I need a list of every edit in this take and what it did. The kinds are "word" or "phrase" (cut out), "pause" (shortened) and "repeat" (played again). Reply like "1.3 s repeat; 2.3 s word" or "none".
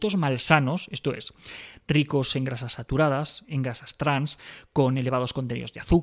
none